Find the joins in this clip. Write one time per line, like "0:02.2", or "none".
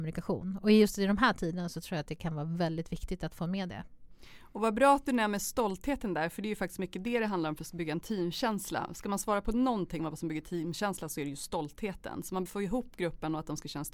0:12.5